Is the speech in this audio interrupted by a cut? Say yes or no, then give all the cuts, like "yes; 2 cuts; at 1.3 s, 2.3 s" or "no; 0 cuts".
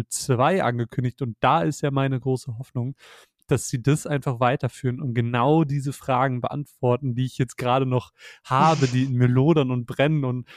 no; 0 cuts